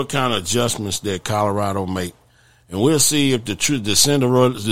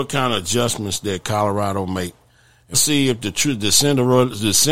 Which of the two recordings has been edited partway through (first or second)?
second